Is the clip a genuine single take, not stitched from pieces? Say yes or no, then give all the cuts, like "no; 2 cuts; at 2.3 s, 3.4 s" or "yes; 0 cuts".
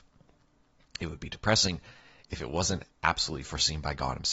yes; 0 cuts